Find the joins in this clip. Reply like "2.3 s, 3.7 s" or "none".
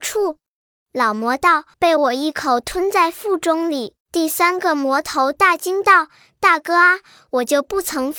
1.7 s, 4.0 s